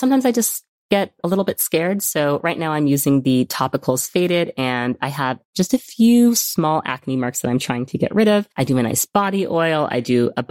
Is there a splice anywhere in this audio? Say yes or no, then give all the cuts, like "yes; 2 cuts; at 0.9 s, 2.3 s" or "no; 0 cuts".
yes; 1 cut; at 8.5 s